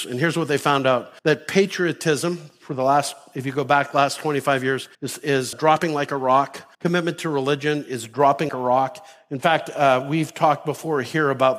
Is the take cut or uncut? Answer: cut